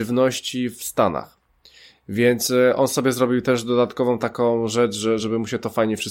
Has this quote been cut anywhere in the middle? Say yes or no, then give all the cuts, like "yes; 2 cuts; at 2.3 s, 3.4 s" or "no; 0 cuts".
no; 0 cuts